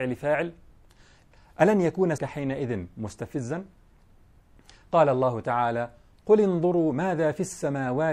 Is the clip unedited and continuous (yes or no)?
no